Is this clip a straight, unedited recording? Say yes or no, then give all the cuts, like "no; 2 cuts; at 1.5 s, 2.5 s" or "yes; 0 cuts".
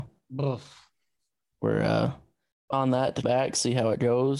no; 2 cuts; at 2.7 s, 3.2 s